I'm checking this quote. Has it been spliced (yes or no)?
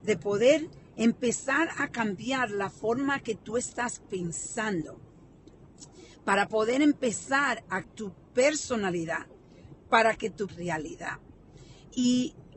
yes